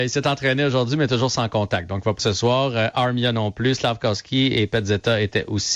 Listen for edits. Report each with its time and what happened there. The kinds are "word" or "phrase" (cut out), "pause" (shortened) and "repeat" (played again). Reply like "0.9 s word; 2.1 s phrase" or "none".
2.2 s word